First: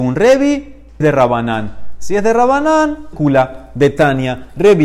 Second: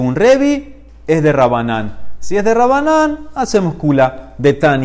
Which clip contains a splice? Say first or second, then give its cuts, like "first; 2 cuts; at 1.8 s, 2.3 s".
first; 2 cuts; at 1.0 s, 3.1 s